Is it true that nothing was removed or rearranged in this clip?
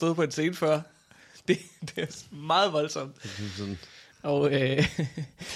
yes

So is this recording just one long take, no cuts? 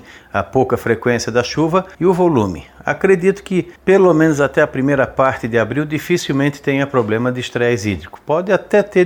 no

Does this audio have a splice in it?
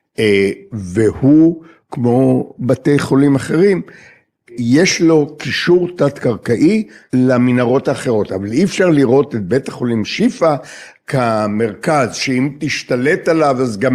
no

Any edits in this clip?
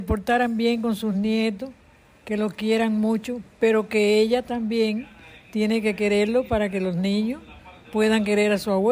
no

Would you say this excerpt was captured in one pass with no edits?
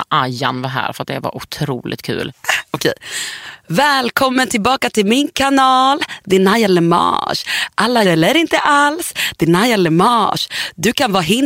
no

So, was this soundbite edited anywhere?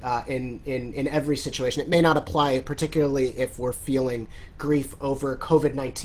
no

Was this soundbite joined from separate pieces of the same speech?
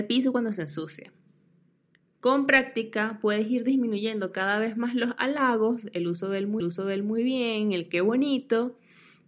yes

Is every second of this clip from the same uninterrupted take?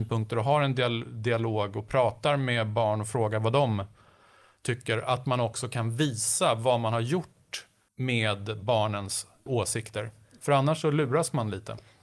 yes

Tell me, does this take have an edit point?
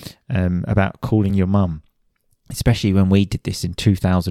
no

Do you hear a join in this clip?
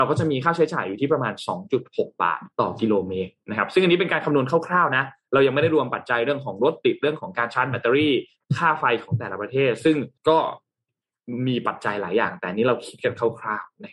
yes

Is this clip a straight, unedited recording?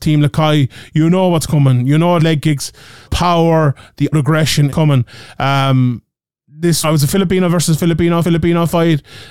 no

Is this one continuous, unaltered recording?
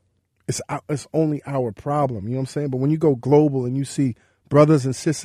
yes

